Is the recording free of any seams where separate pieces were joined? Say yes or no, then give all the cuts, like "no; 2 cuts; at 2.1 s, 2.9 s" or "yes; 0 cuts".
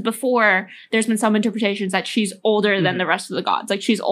yes; 0 cuts